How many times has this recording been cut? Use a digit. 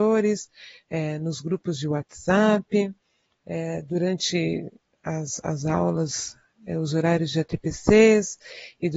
0